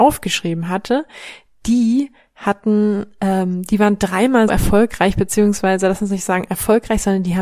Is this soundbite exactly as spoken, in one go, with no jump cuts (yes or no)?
no